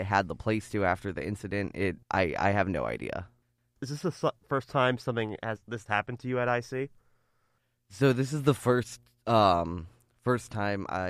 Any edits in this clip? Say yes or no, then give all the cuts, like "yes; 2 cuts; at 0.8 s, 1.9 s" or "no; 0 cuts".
yes; 2 cuts; at 2.0 s, 5.9 s